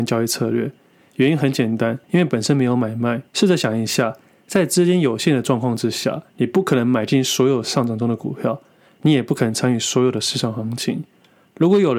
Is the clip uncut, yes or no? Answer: no